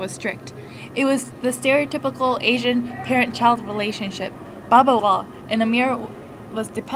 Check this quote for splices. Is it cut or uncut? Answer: cut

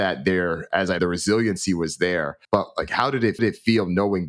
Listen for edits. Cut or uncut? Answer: cut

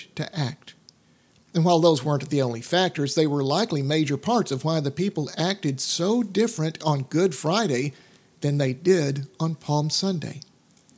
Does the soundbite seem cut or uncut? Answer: uncut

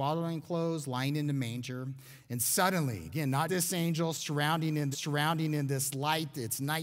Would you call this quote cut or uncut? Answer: cut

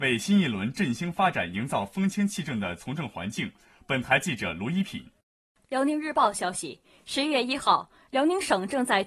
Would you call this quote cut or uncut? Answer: uncut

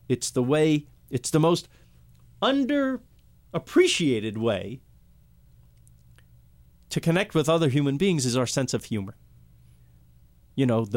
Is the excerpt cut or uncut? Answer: uncut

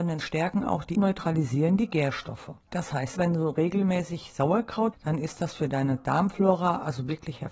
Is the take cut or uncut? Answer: cut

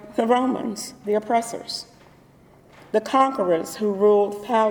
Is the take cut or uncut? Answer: uncut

